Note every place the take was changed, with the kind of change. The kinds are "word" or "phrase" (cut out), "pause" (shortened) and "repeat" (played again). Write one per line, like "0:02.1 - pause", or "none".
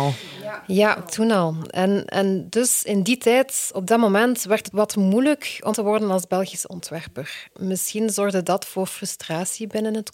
0:04.7 - word
0:05.7 - word